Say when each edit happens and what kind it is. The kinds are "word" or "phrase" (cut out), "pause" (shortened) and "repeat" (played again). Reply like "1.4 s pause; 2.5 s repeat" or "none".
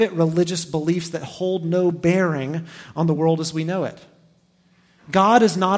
none

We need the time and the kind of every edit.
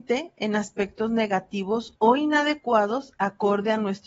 none

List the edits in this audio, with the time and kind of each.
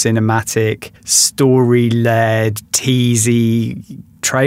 1.0 s pause

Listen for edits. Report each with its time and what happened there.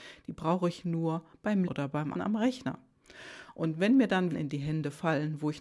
1.6 s word; 2.1 s word; 4.3 s word

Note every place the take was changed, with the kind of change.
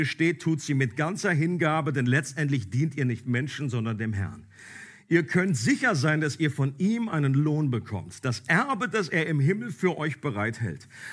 none

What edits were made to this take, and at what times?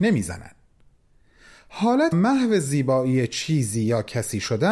2.1 s phrase

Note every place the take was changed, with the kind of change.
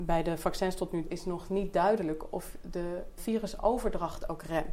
1.1 s word; 2.6 s word; 3.2 s word

